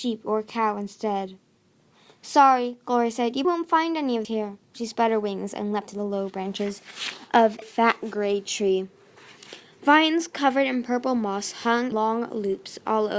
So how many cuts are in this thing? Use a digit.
5